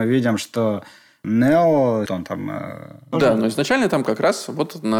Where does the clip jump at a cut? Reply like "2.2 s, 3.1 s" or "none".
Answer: 2.1 s